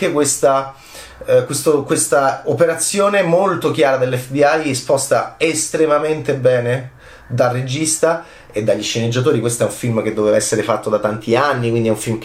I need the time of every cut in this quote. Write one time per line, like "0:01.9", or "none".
none